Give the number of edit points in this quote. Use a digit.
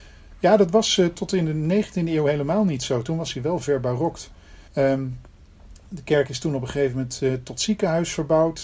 2